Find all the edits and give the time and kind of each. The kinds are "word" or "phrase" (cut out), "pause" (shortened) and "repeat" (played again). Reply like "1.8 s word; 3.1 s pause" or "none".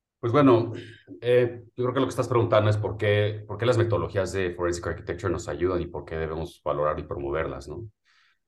none